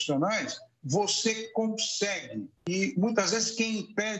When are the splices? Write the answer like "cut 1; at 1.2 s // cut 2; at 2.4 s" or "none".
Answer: cut 1; at 2.6 s